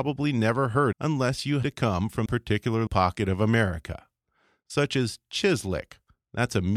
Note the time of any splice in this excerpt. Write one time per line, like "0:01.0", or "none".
0:00.9
0:01.6
0:02.3
0:02.9